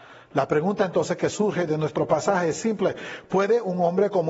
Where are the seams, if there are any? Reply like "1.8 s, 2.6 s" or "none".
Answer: none